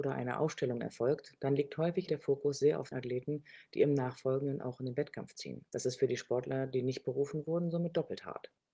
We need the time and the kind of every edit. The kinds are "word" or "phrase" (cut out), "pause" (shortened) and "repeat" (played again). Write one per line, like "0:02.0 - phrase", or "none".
0:02.1 - word
0:02.9 - word
0:05.7 - pause

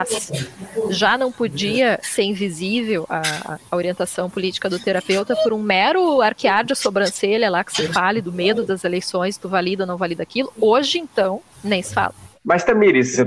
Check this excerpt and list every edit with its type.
0:11.5 - pause
0:12.3 - pause

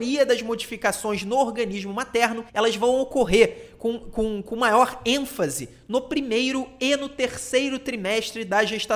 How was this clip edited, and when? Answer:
0:02.5 - pause

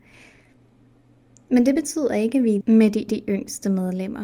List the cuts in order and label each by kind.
0:02.6 - word
0:03.1 - repeat

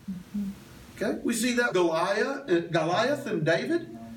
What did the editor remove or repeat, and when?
0:01.7 - word

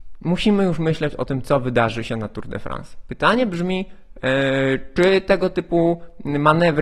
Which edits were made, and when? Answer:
none

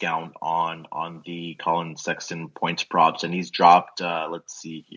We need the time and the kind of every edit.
none

